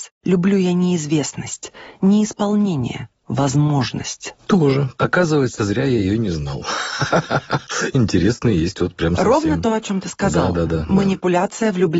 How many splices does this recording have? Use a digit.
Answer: 0